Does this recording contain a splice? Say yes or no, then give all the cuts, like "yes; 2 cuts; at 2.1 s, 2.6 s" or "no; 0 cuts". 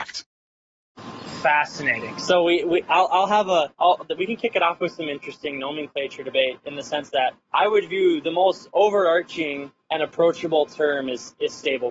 yes; 3 cuts; at 3.7 s, 7.4 s, 9.8 s